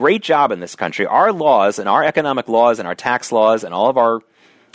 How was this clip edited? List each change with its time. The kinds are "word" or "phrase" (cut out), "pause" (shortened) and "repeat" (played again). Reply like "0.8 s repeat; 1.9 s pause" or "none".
none